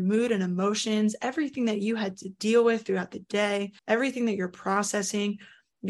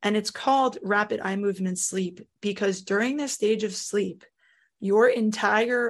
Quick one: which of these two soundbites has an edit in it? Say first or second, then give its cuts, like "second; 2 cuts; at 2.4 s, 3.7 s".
first; 1 cut; at 3.8 s